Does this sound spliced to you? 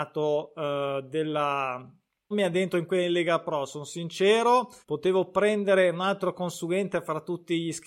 yes; 2 cuts; at 2.3 s, 4.8 s

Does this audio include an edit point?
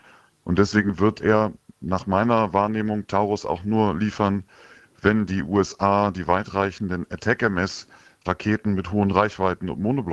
no; 0 cuts

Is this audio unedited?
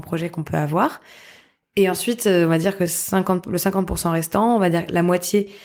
yes; 0 cuts

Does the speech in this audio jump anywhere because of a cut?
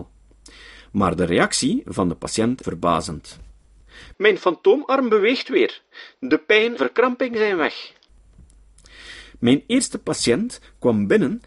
yes; 2 cuts; at 2.6 s, 6.8 s

